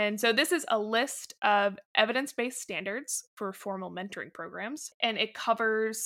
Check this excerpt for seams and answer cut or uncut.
uncut